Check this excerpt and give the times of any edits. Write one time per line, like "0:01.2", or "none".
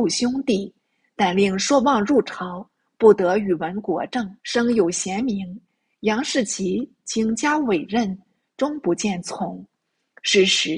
0:04.4